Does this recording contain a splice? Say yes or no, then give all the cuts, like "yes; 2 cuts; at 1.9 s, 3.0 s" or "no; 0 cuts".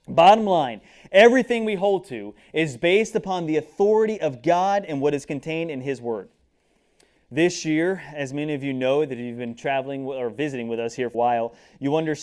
yes; 1 cut; at 11.1 s